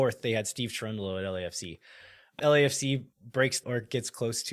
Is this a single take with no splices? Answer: no; 3 cuts; at 2.4 s, 3.1 s, 3.6 s

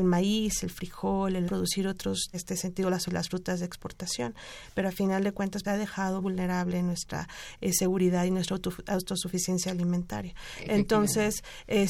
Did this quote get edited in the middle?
yes; 5 cuts; at 1.5 s, 2.3 s, 3.1 s, 5.6 s, 6.2 s

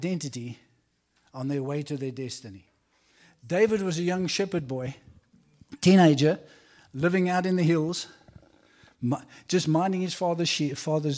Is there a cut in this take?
no; 0 cuts

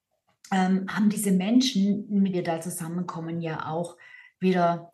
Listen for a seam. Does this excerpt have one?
yes; 1 cut; at 2.3 s

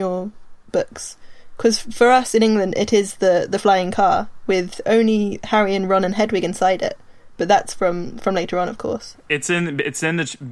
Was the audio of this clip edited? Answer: no; 0 cuts

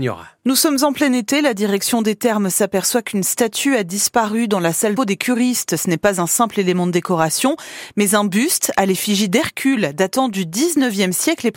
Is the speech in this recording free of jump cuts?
no; 1 cut; at 5.0 s

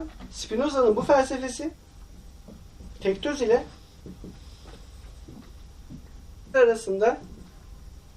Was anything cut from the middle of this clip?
yes; 1 cut; at 6.5 s

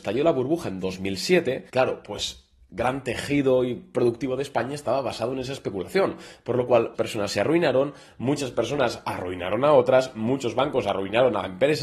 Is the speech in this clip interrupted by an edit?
yes; 2 cuts; at 1.7 s, 6.9 s

